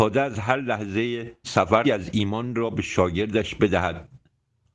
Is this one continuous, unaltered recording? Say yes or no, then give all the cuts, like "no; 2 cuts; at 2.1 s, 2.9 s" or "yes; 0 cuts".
no; 2 cuts; at 1.4 s, 1.8 s